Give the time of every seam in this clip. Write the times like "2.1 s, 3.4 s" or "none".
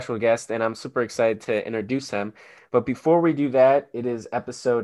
none